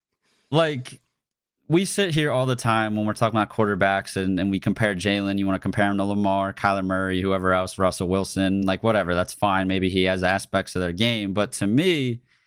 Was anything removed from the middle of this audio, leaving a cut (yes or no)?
no